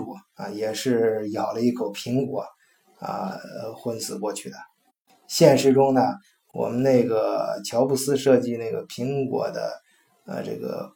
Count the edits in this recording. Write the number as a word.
zero